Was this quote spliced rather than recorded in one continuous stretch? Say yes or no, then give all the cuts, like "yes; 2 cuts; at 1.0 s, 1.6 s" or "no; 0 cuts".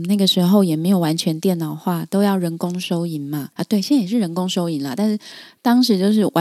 yes; 1 cut; at 3.5 s